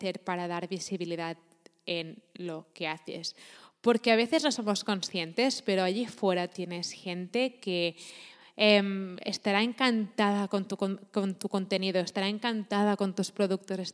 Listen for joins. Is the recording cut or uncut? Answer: uncut